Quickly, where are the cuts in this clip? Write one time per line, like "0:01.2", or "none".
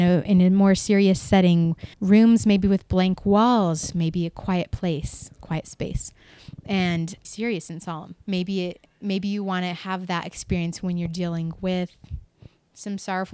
0:01.9
0:07.2
0:08.2